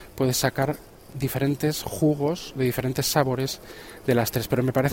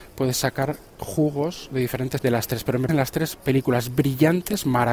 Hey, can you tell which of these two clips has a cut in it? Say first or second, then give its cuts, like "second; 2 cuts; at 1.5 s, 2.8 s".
second; 3 cuts; at 1.0 s, 2.2 s, 2.9 s